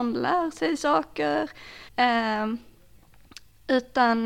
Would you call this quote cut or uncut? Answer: cut